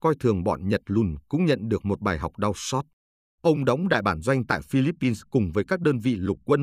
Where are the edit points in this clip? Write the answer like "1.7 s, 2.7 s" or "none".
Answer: none